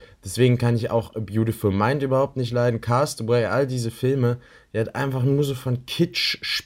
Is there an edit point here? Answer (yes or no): no